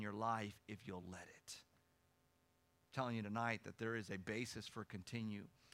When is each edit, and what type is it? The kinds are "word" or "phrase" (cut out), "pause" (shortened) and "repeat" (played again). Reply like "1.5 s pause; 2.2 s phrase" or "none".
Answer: none